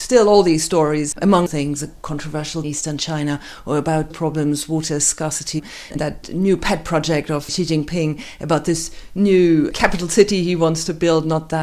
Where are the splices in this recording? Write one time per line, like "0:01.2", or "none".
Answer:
0:01.1
0:01.5
0:02.6
0:04.1
0:05.9
0:07.5
0:09.7